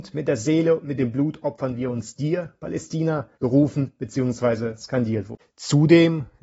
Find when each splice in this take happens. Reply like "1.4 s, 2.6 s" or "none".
3.3 s, 5.5 s